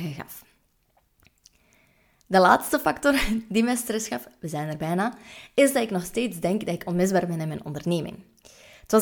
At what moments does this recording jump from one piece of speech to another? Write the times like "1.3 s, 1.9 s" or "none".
none